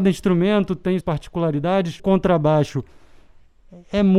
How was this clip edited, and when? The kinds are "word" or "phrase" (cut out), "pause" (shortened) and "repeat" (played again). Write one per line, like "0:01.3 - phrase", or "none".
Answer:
0:01.0 - word
0:02.0 - word